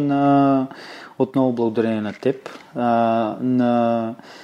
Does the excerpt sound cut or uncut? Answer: uncut